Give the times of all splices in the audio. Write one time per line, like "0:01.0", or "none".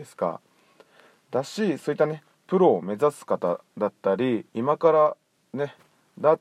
0:04.5